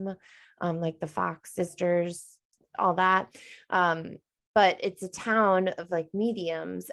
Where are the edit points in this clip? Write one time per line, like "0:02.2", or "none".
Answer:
none